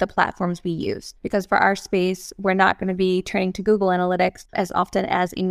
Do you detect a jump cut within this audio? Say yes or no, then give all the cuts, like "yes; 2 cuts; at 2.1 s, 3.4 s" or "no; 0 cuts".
yes; 2 cuts; at 1.2 s, 4.5 s